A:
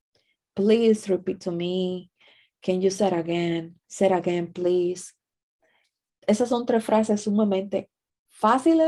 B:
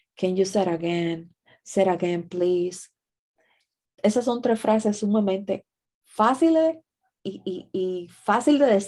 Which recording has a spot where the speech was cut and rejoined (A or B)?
A